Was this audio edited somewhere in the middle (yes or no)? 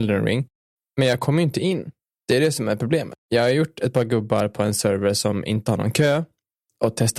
no